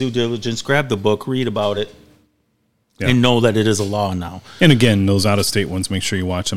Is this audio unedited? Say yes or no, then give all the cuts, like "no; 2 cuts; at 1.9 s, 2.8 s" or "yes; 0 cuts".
yes; 0 cuts